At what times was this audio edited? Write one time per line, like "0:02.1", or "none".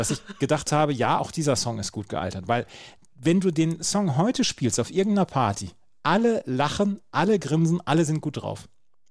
none